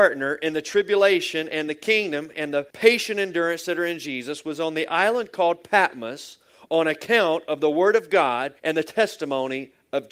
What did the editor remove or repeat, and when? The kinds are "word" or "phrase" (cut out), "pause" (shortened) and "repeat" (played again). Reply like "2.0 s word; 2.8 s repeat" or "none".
2.7 s pause; 8.6 s pause